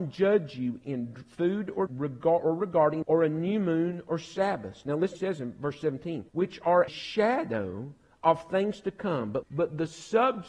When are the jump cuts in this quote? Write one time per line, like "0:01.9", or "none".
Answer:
0:01.9
0:03.0
0:05.1
0:06.3
0:06.9
0:09.4

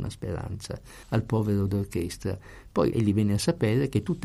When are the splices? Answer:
0:01.0
0:01.7
0:02.9

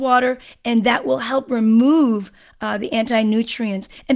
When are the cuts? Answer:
none

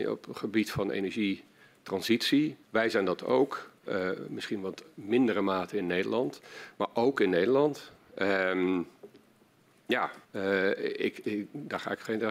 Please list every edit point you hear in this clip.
0:02.6
0:03.8
0:10.2

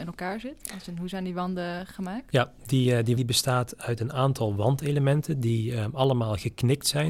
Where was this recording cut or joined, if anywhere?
0:03.2

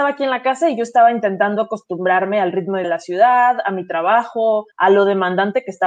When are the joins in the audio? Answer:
0:02.8
0:04.7

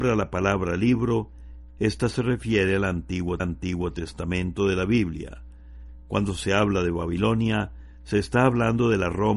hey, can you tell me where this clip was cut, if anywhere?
0:03.4

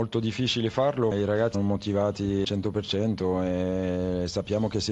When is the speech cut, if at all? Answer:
0:01.1
0:01.5
0:02.4

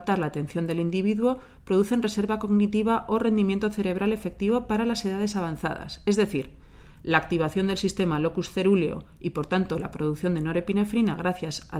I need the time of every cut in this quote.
none

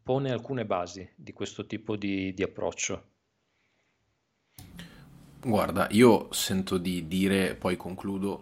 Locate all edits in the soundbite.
none

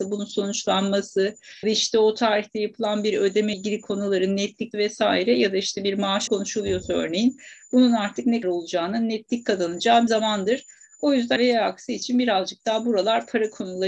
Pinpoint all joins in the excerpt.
0:01.6
0:03.5
0:04.7
0:06.3
0:08.4
0:10.1
0:11.4

